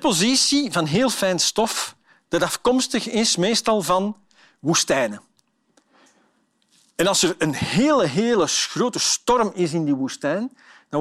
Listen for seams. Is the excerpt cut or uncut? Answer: uncut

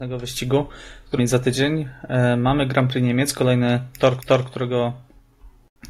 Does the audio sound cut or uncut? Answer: cut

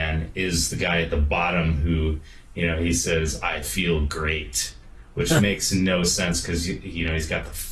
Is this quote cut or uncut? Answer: uncut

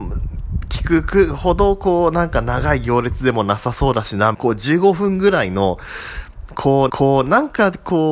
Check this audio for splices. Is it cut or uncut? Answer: cut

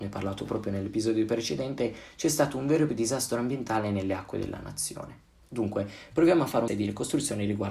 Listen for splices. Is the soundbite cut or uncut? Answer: cut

